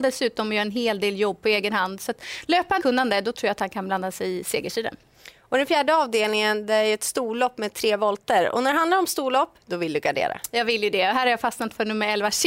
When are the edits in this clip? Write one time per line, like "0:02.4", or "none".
0:02.8